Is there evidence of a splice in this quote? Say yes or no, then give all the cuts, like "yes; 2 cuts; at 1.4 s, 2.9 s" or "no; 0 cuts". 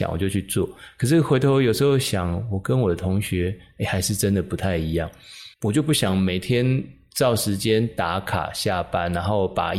yes; 1 cut; at 5.5 s